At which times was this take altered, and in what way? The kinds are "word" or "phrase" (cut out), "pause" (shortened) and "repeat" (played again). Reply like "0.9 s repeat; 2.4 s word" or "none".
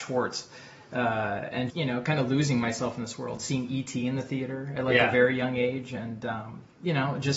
1.7 s word

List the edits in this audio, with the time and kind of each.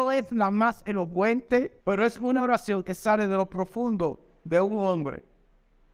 1.8 s pause

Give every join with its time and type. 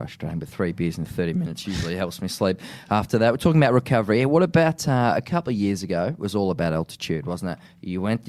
none

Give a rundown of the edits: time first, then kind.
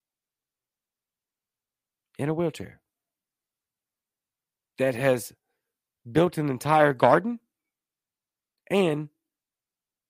none

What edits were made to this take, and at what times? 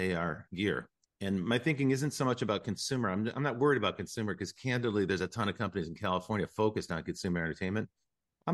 1.0 s pause

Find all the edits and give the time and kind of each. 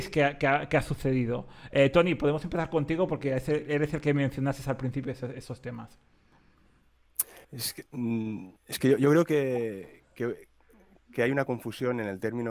7.4 s pause; 8.6 s pause

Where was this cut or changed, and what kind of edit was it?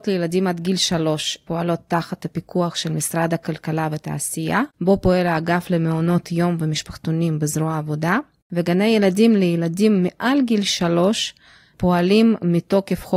4.7 s pause

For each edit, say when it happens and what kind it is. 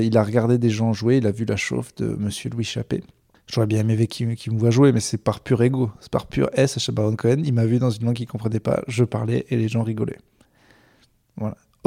3.3 s pause

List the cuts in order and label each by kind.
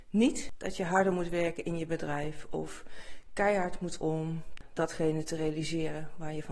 4.0 s word

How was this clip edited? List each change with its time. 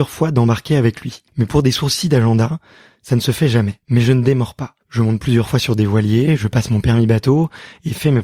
1.3 s pause; 3.8 s pause; 4.8 s pause

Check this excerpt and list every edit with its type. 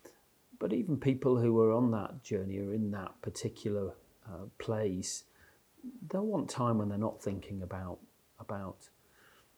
none

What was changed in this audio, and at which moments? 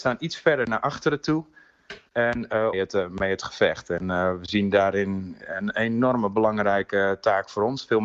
2.7 s phrase

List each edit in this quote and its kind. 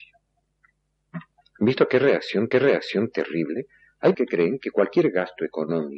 1.4 s pause; 2.5 s repeat; 4.1 s word

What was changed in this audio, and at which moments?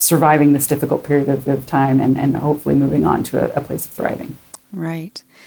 1.5 s repeat; 4.5 s pause

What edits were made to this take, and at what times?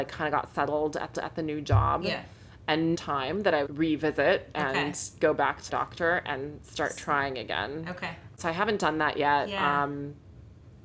1.1 s repeat; 2.9 s phrase; 3.7 s phrase; 5.7 s word

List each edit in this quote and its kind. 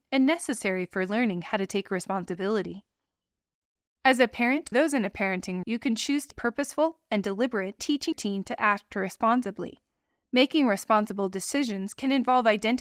4.7 s word; 5.6 s word; 6.3 s word; 7.8 s word; 8.1 s word

